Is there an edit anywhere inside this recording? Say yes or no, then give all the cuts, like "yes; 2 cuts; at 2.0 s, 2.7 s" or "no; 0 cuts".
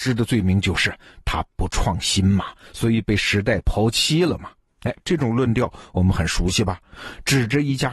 no; 0 cuts